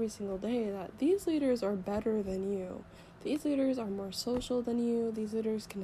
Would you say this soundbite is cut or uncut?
uncut